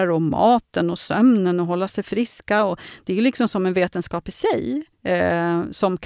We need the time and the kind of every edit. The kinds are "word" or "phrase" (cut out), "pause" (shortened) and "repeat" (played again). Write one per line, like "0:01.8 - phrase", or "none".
0:04.9 - pause